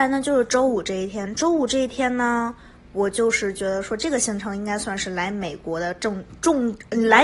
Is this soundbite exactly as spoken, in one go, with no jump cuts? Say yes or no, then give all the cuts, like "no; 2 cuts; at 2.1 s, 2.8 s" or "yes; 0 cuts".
yes; 0 cuts